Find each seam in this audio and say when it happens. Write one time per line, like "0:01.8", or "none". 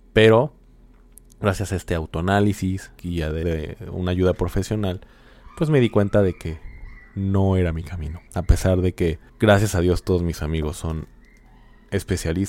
0:03.0
0:03.4
0:08.3
0:09.3